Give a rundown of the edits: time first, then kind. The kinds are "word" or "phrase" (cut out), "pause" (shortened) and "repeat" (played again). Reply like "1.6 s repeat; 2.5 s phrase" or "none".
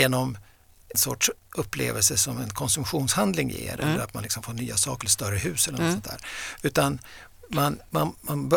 0.9 s word